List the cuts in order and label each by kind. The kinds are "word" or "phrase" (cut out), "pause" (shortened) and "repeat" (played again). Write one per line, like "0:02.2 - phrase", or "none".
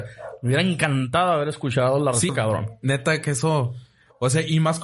0:02.3 - phrase